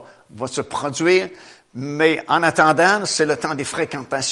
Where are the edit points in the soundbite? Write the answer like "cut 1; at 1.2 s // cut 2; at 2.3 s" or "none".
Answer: none